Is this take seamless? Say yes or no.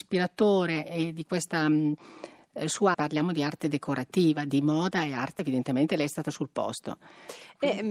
no